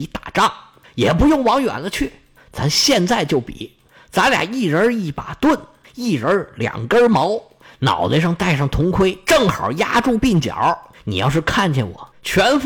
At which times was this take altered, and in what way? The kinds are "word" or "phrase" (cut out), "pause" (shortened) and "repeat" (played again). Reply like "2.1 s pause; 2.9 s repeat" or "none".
none